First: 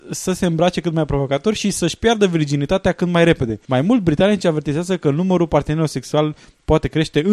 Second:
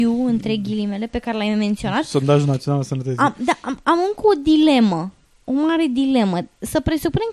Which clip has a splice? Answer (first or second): first